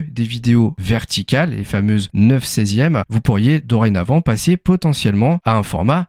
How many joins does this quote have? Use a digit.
1